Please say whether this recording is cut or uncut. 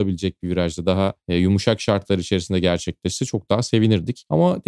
uncut